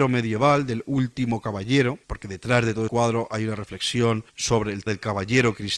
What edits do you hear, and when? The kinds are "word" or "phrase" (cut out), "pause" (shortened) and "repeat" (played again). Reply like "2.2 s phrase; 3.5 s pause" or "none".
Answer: 2.0 s pause; 2.9 s word; 4.3 s pause; 4.9 s word